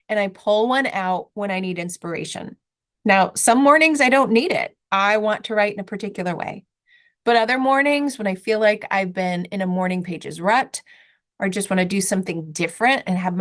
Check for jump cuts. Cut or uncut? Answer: uncut